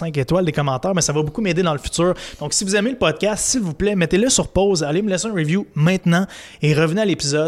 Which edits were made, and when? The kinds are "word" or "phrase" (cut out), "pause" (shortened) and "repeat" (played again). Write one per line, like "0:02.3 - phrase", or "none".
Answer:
none